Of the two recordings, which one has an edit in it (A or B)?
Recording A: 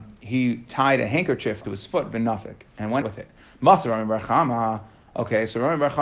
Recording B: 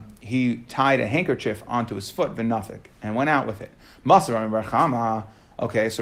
A